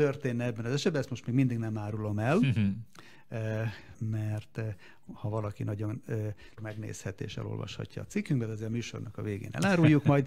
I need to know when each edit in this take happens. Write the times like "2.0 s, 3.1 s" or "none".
3.9 s, 6.6 s